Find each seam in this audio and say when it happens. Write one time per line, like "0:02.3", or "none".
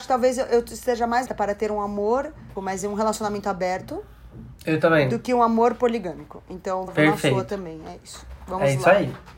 0:01.3
0:02.6
0:06.9